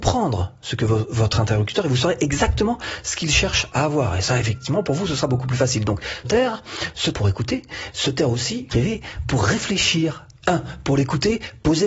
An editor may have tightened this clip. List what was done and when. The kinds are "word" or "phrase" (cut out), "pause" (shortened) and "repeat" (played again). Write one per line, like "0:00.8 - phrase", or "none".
0:06.2 - word
0:07.1 - word
0:08.7 - phrase